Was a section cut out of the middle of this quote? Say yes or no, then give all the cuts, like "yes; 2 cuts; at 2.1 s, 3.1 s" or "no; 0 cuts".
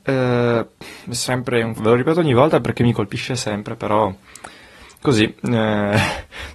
yes; 1 cut; at 1.8 s